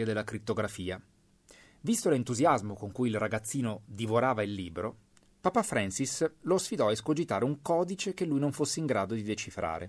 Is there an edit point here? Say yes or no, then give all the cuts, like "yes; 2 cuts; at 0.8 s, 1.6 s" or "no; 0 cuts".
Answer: no; 0 cuts